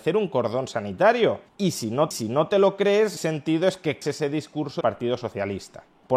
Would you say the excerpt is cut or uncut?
cut